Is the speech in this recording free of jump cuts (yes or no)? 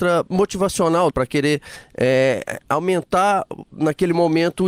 no